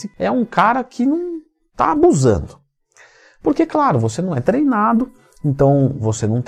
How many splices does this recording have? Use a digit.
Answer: 0